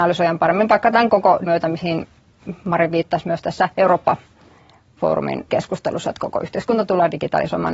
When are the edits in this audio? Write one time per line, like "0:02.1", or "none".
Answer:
0:01.5
0:03.7
0:05.5